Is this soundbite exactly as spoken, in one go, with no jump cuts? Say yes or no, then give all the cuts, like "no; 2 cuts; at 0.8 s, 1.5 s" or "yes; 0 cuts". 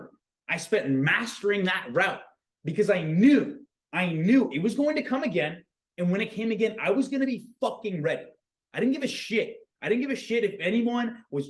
yes; 0 cuts